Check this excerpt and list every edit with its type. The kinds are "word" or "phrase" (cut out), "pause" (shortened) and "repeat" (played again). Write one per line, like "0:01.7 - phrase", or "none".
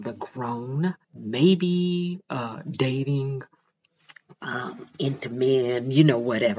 0:01.0 - pause